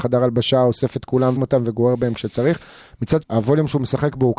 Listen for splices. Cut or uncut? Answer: cut